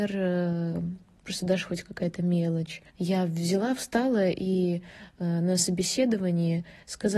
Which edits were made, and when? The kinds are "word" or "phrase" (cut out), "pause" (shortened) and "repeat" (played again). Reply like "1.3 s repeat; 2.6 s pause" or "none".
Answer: 2.9 s pause